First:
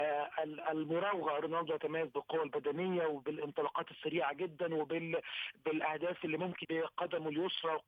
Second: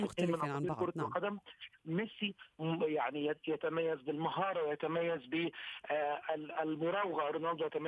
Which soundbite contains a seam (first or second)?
first